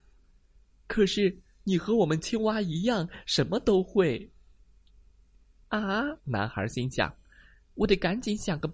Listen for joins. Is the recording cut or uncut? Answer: cut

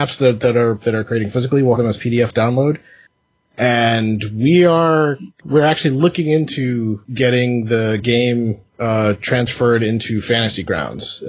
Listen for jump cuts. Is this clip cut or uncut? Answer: cut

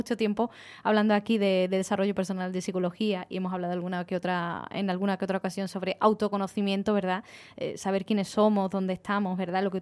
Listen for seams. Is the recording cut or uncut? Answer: uncut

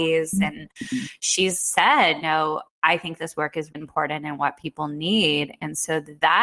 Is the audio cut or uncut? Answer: cut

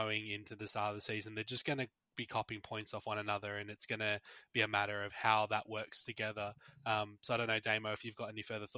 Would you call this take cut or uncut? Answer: uncut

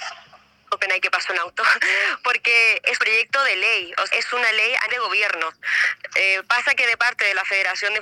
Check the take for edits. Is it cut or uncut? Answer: cut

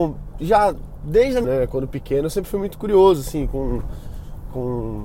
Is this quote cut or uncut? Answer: cut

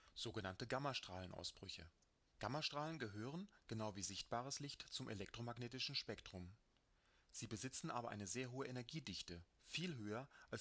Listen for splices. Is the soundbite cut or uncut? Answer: uncut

